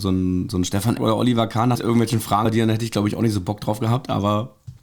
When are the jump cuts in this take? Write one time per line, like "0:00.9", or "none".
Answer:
0:01.0
0:01.7
0:02.4